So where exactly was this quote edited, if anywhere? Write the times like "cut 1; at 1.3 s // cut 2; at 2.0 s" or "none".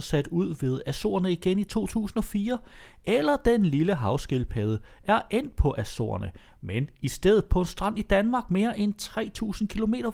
none